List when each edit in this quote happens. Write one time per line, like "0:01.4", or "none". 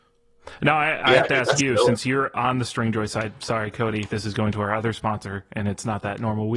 none